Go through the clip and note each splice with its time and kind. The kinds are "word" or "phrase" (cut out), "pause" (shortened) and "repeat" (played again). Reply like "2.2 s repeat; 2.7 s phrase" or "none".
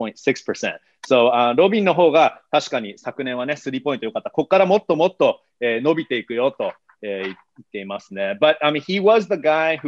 none